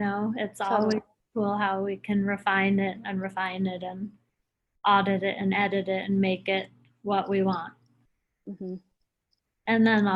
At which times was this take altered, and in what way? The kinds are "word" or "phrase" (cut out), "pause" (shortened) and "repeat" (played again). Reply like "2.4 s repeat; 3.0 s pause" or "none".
none